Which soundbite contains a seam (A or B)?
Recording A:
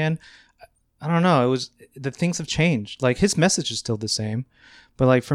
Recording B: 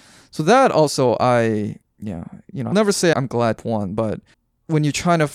B